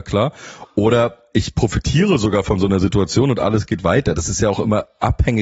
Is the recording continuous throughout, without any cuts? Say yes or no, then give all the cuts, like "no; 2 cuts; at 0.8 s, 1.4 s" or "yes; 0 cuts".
yes; 0 cuts